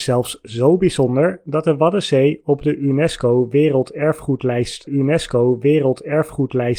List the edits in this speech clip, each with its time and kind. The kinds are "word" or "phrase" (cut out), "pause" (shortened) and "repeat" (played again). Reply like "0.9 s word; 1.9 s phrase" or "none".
4.9 s repeat